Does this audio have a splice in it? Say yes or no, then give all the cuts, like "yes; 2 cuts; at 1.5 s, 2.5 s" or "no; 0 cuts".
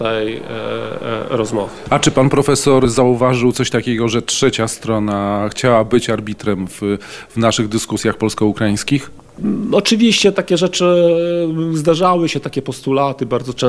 no; 0 cuts